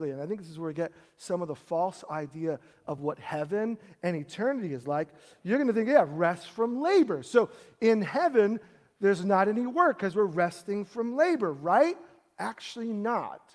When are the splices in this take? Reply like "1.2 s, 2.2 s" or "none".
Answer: none